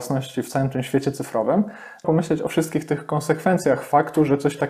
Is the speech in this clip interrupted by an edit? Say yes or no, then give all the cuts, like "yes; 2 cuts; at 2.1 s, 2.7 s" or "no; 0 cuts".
yes; 1 cut; at 2.0 s